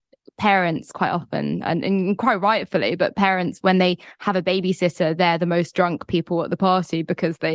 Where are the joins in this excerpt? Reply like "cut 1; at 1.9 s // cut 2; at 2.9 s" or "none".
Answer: none